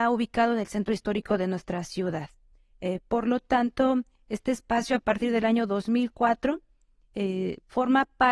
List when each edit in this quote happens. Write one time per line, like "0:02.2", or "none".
none